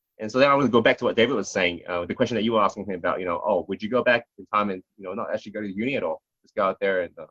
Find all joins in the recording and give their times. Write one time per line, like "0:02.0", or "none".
0:04.3